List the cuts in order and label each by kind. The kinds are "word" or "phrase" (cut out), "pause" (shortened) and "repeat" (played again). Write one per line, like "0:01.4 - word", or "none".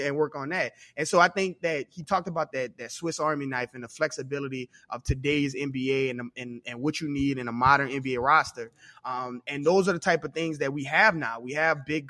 0:02.5 - word